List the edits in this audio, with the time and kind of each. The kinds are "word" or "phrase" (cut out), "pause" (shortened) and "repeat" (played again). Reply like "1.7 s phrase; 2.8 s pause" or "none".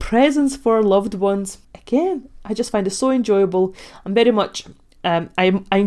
1.6 s pause